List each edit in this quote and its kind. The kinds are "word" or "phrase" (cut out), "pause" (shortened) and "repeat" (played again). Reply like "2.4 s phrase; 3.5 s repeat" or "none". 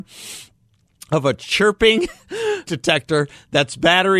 2.6 s phrase